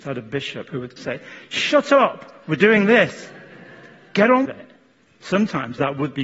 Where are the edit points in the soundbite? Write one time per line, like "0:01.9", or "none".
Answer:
0:01.0
0:04.5